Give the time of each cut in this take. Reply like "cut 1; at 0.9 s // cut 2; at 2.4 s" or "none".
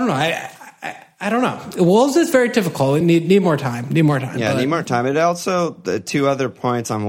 none